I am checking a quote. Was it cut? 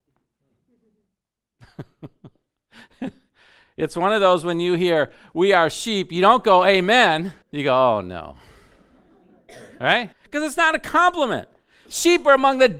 yes; 2 cuts; at 7.4 s, 10.1 s

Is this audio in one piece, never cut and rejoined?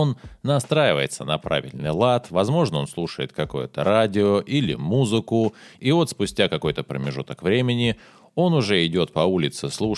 yes; 0 cuts

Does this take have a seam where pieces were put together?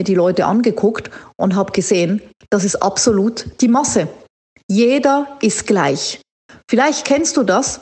no; 0 cuts

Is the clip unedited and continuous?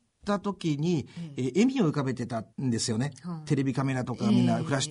no; 1 cut; at 2.5 s

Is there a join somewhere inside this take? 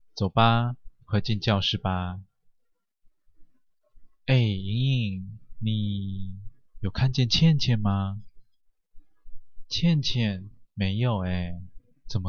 no; 0 cuts

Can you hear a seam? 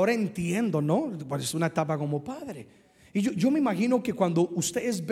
no; 0 cuts

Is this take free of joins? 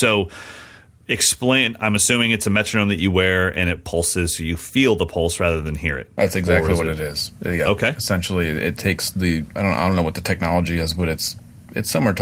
yes; 0 cuts

